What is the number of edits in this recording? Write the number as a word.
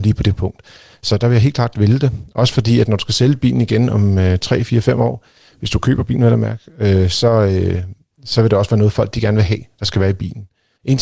zero